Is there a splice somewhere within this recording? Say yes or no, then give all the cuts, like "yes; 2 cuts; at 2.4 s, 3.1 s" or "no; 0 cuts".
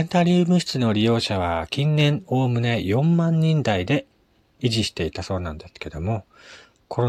no; 0 cuts